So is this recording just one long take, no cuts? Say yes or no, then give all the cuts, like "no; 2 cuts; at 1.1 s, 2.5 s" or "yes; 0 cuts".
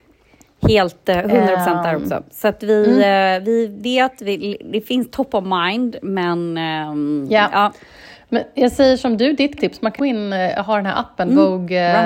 no; 2 cuts; at 9.6 s, 10.0 s